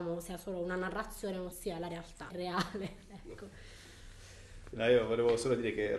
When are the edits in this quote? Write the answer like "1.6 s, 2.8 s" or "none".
1.5 s, 2.3 s